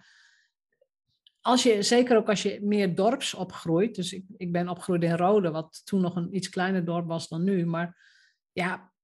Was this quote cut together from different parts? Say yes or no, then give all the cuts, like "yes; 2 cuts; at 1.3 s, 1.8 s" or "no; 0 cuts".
no; 0 cuts